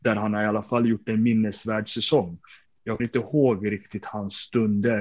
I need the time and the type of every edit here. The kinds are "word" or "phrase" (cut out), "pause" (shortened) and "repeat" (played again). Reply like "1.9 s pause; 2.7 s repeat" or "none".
3.0 s word